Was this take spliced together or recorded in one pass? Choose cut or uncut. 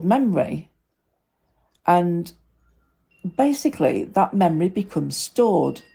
uncut